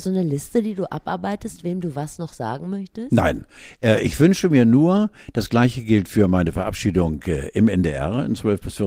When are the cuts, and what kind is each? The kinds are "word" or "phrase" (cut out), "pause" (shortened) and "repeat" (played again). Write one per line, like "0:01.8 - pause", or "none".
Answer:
none